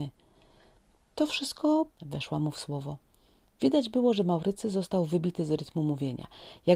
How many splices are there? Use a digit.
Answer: 1